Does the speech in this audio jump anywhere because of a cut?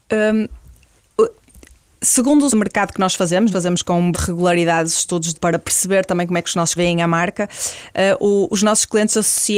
yes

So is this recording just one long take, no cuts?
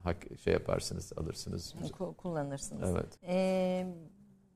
no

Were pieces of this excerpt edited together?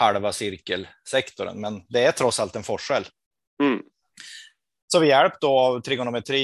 no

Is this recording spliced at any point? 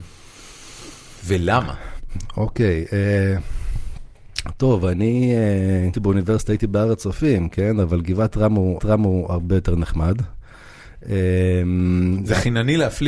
yes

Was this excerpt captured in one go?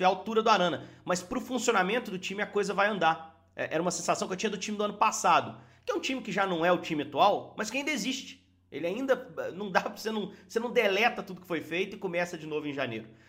yes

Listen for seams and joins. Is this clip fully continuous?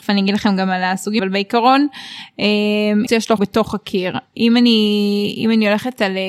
no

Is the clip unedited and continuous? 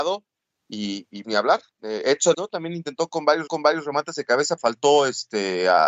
no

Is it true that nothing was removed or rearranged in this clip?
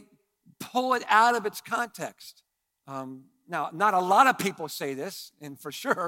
no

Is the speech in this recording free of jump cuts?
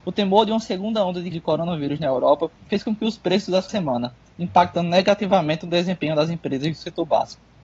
no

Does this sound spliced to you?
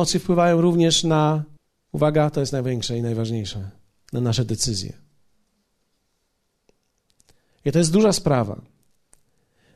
yes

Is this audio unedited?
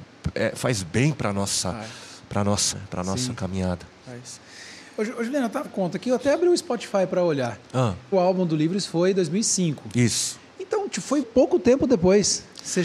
no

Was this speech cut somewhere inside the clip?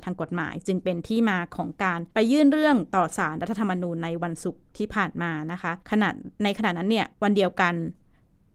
yes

